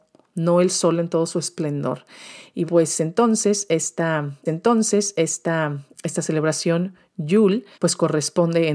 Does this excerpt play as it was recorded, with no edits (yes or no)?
no